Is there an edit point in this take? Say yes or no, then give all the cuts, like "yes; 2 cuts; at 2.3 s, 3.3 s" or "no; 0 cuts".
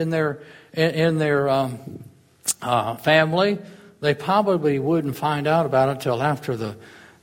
no; 0 cuts